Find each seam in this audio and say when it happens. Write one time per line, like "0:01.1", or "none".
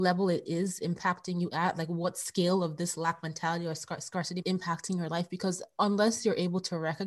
0:04.4